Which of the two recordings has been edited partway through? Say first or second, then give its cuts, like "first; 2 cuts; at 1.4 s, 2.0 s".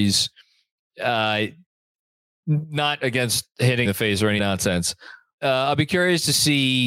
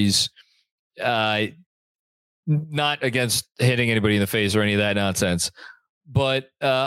first; 3 cuts; at 3.8 s, 4.4 s, 5.4 s